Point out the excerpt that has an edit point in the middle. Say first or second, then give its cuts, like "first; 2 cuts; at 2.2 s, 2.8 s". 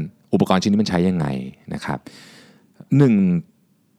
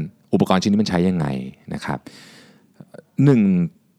first; 1 cut; at 2.9 s